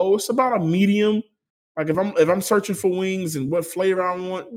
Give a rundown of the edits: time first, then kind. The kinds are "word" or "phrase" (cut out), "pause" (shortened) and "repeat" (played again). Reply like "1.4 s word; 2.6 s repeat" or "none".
none